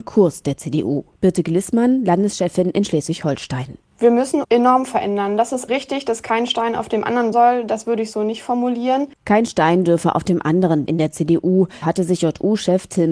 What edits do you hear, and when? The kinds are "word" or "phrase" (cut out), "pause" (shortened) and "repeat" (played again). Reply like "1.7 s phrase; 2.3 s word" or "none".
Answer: 1.1 s pause; 4.4 s word; 5.7 s word; 7.3 s word; 9.1 s pause; 10.9 s word; 11.8 s word